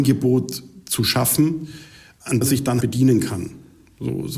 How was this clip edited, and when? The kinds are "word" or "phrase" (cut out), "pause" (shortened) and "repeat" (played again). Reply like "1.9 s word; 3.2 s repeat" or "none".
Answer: 2.4 s word; 2.8 s word

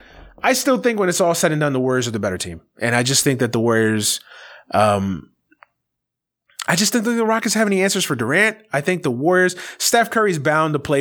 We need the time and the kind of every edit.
none

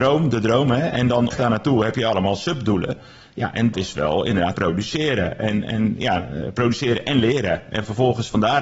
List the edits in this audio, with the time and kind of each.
1.3 s word; 3.7 s word; 4.5 s word

